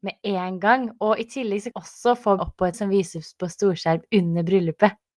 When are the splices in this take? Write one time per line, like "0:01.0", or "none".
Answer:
0:01.7
0:02.4
0:02.7

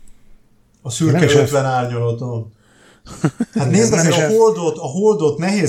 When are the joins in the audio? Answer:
none

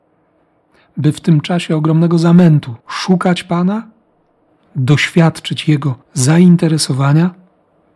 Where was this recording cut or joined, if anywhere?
0:02.8
0:06.0

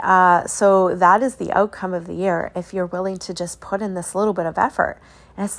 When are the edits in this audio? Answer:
none

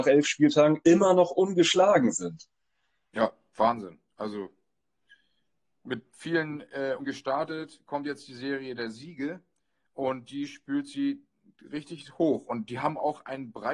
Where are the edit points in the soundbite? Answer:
0:07.0

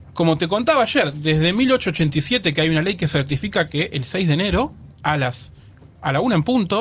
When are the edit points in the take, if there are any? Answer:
none

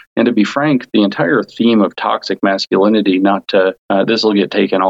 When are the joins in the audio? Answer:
0:03.8

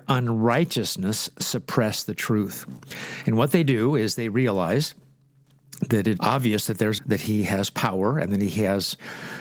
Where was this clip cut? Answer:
0:06.2
0:07.0

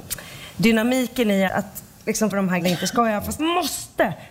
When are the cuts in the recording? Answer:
0:01.5
0:02.3
0:02.6
0:03.4

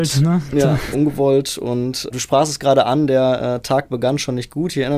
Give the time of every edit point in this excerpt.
0:00.9
0:02.1

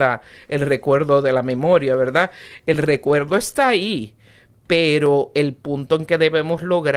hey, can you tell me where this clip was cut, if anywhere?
none

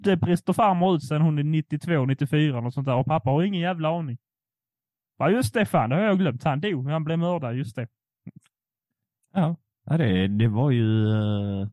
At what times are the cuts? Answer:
none

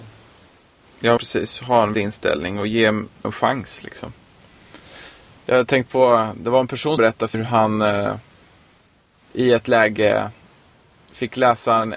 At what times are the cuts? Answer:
0:01.2
0:01.9
0:03.2
0:05.9
0:07.0
0:07.3

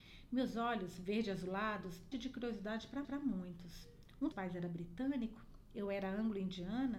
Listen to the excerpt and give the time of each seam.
0:02.1
0:03.0
0:04.3

